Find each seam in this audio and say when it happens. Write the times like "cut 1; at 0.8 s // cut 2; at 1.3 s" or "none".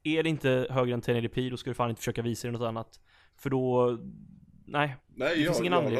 none